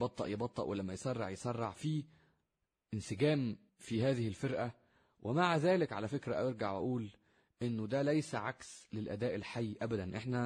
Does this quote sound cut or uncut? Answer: uncut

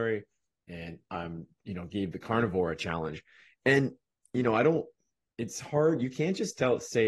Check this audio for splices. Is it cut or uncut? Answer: uncut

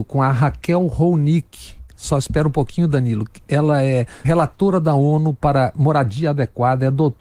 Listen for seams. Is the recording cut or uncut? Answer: cut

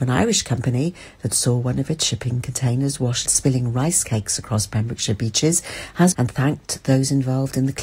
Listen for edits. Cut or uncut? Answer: cut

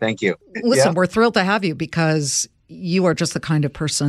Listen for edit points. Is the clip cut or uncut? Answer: uncut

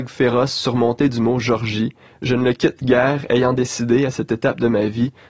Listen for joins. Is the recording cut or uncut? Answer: uncut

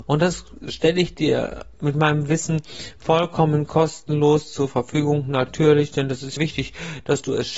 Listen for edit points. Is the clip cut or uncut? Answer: cut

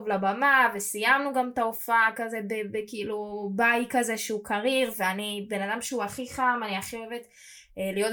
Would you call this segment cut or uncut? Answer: uncut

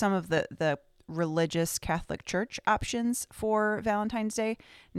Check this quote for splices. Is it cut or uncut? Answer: uncut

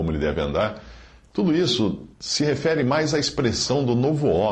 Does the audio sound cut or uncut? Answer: cut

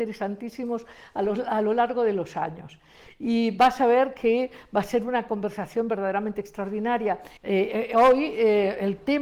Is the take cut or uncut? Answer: cut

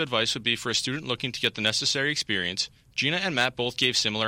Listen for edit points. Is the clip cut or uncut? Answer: uncut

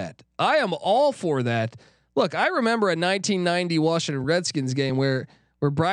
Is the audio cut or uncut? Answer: uncut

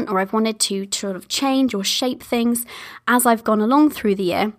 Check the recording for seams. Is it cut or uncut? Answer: uncut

